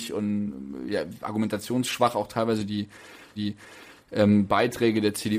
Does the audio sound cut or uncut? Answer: cut